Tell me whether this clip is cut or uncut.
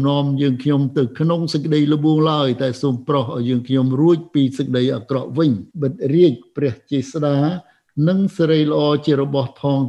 cut